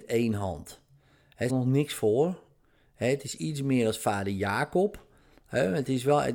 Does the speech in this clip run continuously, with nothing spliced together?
no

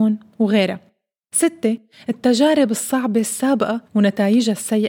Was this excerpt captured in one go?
no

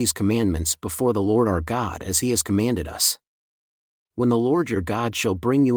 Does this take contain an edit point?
no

